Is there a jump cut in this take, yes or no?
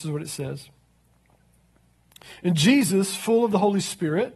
no